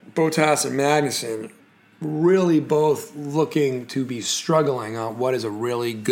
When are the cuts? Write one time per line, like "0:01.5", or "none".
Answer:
none